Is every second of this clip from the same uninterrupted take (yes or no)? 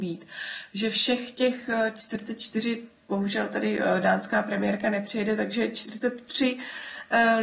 yes